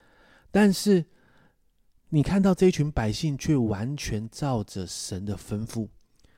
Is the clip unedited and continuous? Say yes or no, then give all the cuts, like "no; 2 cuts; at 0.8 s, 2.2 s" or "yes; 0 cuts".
yes; 0 cuts